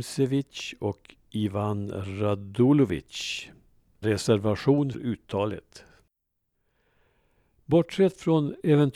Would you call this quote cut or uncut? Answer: cut